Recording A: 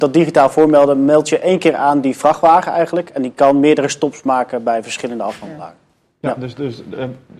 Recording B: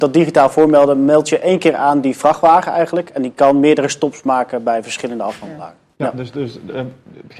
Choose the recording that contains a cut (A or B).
B